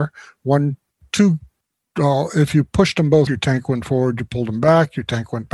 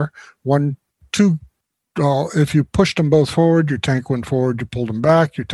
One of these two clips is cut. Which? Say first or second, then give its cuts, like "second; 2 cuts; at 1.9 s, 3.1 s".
first; 1 cut; at 3.3 s